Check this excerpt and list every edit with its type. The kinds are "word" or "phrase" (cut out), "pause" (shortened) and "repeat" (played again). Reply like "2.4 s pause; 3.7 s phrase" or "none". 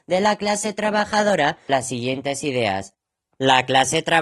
1.7 s word